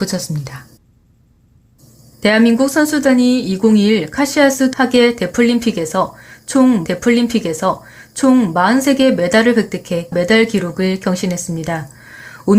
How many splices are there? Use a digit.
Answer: 3